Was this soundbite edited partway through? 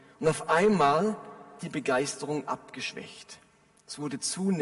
yes; 1 cut; at 1.6 s

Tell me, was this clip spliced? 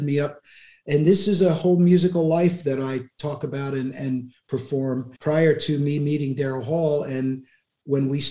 yes; 1 cut; at 5.2 s

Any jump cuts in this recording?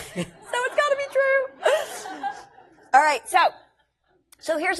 no; 0 cuts

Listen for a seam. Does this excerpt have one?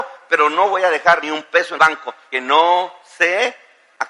yes; 3 cuts; at 1.2 s, 1.8 s, 2.3 s

